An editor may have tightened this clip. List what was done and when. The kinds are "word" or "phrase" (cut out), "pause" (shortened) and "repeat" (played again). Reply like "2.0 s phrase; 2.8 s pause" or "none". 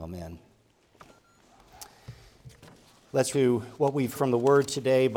3.3 s word; 4.1 s word